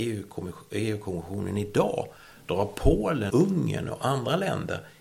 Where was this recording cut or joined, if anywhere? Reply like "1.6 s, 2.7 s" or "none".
3.3 s